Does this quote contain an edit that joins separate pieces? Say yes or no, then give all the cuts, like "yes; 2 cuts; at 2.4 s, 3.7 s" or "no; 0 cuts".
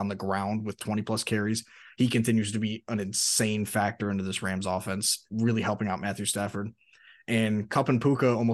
no; 0 cuts